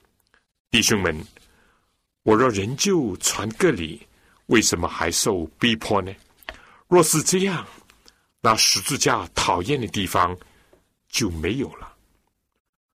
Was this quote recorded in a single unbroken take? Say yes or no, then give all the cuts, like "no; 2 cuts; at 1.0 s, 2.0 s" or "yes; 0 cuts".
yes; 0 cuts